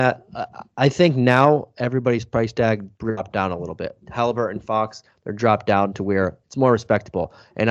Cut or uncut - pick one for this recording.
cut